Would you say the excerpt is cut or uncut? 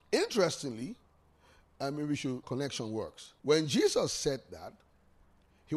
cut